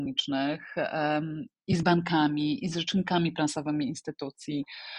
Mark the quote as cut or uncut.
uncut